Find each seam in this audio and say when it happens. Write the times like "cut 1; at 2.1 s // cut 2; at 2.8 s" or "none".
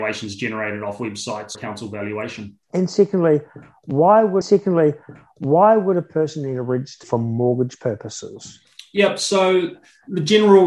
cut 1; at 1.5 s // cut 2; at 2.6 s // cut 3; at 4.4 s // cut 4; at 7.0 s